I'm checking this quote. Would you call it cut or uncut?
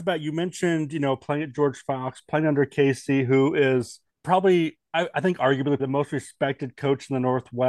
cut